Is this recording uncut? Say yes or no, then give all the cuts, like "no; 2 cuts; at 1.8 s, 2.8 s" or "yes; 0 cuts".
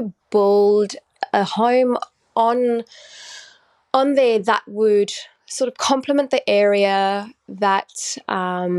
yes; 0 cuts